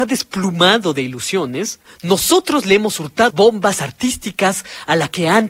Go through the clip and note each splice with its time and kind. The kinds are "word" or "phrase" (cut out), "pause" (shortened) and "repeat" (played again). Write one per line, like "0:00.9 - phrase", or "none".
0:03.3 - word